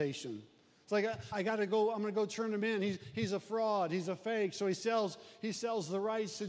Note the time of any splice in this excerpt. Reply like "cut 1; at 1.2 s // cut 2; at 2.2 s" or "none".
cut 1; at 1.3 s